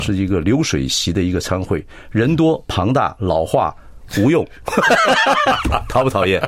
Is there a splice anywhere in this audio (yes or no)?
no